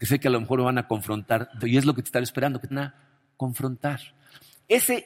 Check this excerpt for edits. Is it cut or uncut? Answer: cut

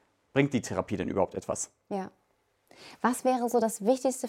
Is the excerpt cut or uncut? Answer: uncut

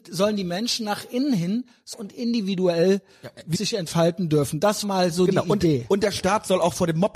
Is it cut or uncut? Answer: cut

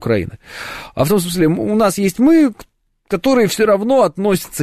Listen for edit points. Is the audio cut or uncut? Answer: uncut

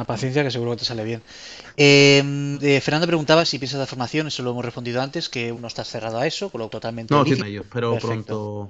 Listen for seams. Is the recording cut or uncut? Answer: cut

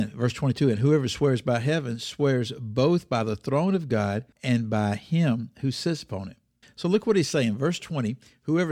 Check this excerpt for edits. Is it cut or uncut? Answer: cut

